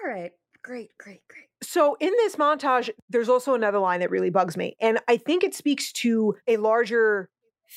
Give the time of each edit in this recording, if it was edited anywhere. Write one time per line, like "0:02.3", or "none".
0:01.5
0:06.4